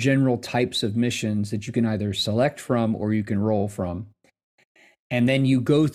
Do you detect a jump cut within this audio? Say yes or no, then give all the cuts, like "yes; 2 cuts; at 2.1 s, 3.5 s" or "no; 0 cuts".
no; 0 cuts